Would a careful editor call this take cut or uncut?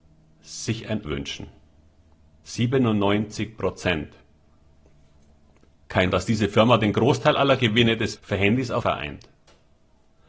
cut